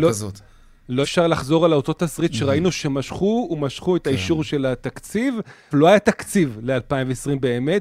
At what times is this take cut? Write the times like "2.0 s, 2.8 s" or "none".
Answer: 1.0 s, 3.5 s, 5.7 s